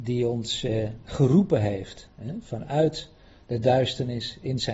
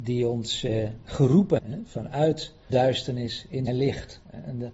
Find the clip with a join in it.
second; 3 cuts; at 1.6 s, 2.7 s, 3.7 s

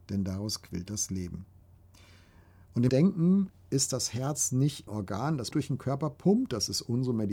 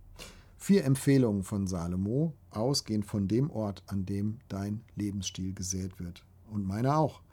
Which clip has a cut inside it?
first; 3 cuts; at 2.9 s, 4.9 s, 5.5 s

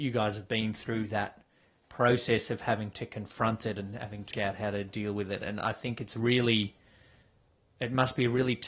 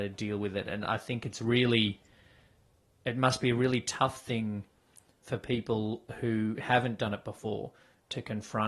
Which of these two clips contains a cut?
first; 1 cut; at 4.3 s

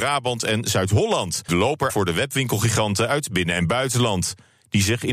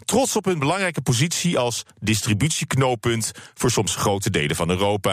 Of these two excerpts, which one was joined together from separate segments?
first; 2 cuts; at 1.5 s, 1.9 s

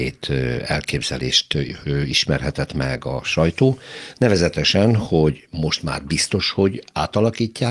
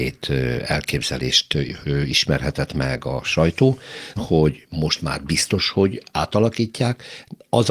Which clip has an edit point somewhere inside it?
second; 1 cut; at 4.2 s

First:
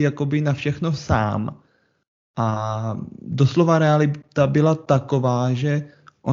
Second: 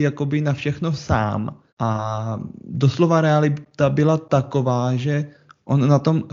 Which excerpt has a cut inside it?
second; 1 cut; at 1.7 s

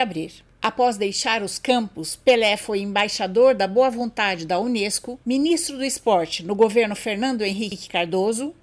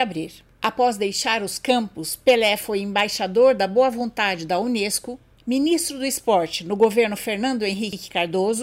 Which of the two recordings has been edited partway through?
first; 1 cut; at 5.2 s

